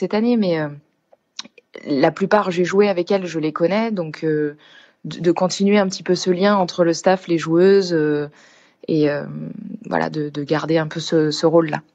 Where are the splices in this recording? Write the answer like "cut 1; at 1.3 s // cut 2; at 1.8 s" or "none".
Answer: none